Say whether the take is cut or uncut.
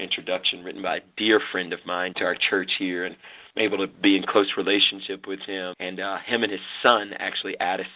cut